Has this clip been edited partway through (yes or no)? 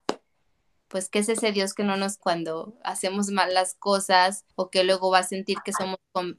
yes